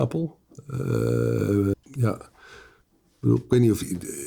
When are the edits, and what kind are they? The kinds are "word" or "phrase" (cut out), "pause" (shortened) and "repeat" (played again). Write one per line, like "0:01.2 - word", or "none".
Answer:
0:01.7 - word